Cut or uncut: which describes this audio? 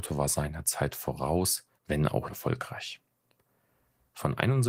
cut